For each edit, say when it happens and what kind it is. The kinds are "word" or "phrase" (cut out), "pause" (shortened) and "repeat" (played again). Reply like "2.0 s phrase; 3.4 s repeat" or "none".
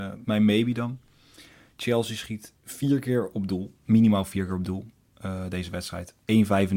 2.6 s pause